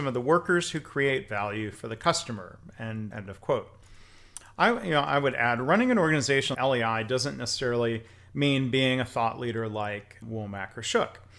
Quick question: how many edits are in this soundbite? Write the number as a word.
three